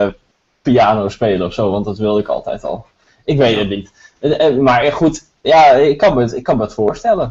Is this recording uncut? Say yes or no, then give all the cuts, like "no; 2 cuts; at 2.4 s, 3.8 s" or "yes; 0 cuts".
yes; 0 cuts